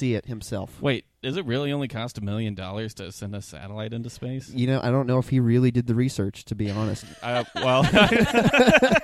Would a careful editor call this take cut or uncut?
uncut